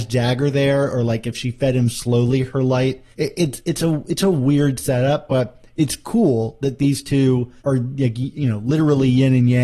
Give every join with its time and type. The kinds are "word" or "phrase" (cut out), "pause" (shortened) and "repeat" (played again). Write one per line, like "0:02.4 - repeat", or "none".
0:03.1 - pause
0:07.6 - pause